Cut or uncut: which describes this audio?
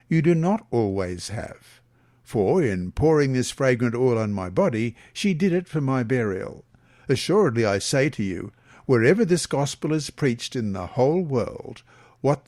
uncut